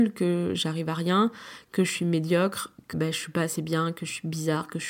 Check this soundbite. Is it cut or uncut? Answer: cut